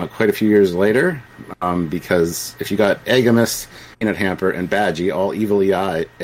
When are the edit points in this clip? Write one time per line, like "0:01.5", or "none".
0:03.9